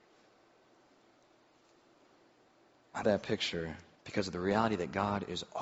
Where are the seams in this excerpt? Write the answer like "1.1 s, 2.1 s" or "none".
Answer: 3.0 s, 3.9 s